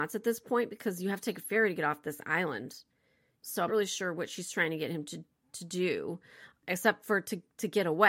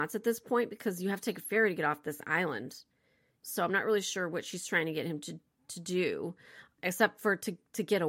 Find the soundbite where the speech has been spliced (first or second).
first